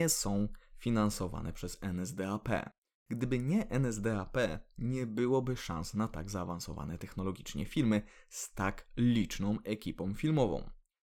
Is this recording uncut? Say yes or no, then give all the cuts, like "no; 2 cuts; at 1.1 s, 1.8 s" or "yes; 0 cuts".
yes; 0 cuts